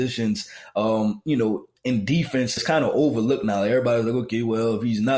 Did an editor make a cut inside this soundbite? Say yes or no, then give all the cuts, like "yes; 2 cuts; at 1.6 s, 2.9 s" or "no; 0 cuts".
yes; 2 cuts; at 1.8 s, 2.6 s